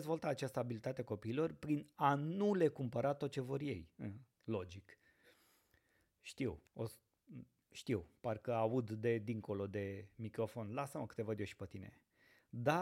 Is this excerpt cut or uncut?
cut